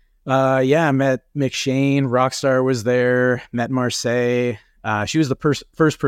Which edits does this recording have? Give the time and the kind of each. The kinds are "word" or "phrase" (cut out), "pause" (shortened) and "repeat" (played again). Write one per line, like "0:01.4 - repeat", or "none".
none